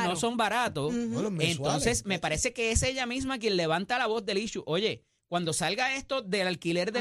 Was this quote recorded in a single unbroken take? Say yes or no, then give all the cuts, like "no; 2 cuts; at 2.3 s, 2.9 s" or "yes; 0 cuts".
yes; 0 cuts